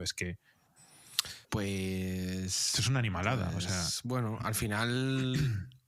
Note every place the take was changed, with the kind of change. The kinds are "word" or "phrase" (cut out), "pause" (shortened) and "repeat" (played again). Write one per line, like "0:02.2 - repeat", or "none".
0:01.4 - pause